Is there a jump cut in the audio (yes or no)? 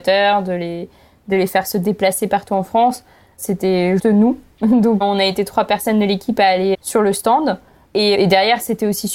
yes